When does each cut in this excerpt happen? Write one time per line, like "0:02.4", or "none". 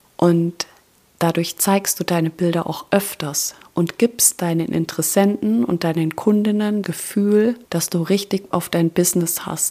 0:06.8
0:07.6
0:08.5